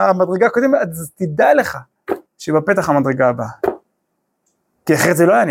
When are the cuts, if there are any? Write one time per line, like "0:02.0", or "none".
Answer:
0:02.3